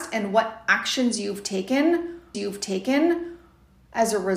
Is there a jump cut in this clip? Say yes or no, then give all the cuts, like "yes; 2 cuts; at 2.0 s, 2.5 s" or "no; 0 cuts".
yes; 1 cut; at 2.3 s